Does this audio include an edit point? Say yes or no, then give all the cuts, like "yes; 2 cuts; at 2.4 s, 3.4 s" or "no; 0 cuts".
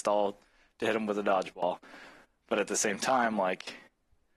no; 0 cuts